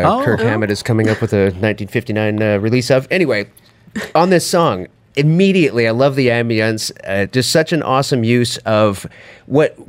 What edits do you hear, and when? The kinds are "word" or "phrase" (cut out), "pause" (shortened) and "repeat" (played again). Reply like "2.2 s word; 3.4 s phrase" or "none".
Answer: none